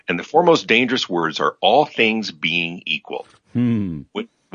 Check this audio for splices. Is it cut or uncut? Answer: uncut